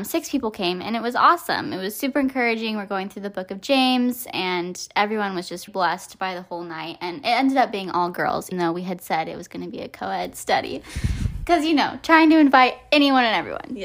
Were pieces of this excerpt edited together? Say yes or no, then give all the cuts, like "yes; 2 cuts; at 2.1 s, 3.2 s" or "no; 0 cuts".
yes; 2 cuts; at 5.7 s, 8.5 s